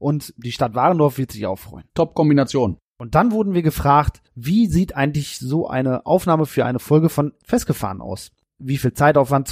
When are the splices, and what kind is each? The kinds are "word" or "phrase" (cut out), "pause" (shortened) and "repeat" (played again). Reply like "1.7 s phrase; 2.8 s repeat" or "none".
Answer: 1.9 s pause; 4.3 s pause